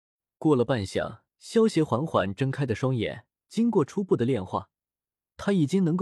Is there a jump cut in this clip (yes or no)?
yes